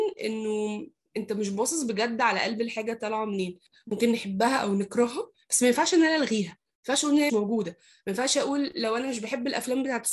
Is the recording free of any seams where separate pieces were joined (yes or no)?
no